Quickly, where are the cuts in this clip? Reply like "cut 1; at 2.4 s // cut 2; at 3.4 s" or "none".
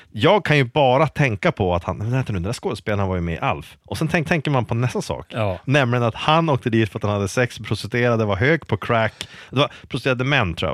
cut 1; at 3.8 s // cut 2; at 4.3 s